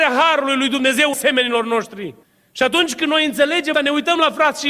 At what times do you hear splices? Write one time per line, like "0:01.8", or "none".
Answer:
0:01.1
0:02.2
0:03.7